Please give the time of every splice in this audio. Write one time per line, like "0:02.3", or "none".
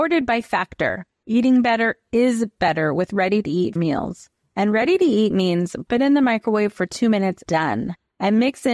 0:03.8
0:05.9
0:07.5